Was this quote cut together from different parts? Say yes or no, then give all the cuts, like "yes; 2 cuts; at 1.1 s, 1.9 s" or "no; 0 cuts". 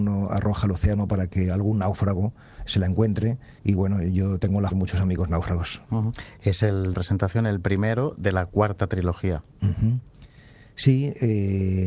yes; 3 cuts; at 3.6 s, 4.7 s, 6.9 s